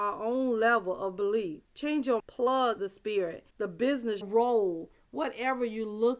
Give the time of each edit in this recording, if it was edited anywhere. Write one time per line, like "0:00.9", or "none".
0:01.7
0:02.2
0:02.8
0:03.5
0:04.2